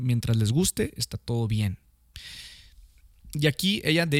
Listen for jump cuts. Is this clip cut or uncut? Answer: uncut